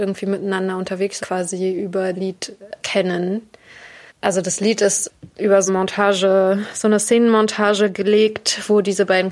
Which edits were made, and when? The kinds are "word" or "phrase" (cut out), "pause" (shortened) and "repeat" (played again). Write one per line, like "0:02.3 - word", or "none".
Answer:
0:01.2 - phrase
0:02.1 - word
0:02.8 - word
0:04.1 - pause
0:05.7 - word